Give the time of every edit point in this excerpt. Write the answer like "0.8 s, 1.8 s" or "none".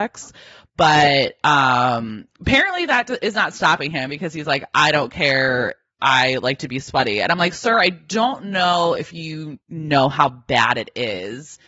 none